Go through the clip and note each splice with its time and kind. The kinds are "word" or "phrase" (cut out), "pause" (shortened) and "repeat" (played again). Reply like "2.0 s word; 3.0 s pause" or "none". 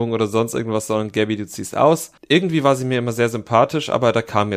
2.2 s pause